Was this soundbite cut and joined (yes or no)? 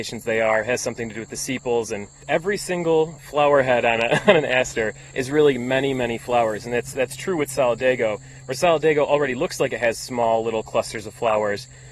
no